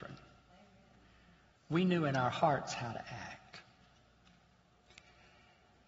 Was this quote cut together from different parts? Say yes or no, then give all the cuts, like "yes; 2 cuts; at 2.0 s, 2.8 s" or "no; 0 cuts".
no; 0 cuts